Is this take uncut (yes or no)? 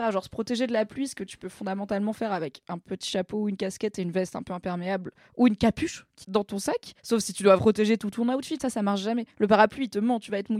no